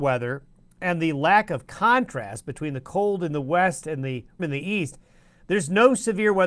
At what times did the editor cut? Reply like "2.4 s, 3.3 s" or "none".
4.4 s